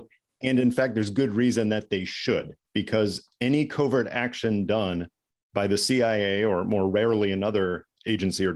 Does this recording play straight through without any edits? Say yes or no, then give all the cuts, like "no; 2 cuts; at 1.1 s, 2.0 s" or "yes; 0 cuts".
yes; 0 cuts